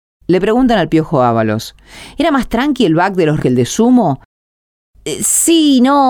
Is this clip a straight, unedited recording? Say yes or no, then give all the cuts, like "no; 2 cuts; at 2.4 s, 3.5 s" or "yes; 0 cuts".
no; 1 cut; at 3.4 s